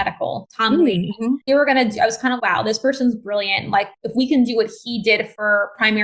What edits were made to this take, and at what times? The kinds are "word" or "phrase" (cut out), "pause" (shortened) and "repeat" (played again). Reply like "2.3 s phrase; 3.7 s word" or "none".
1.5 s phrase; 2.4 s word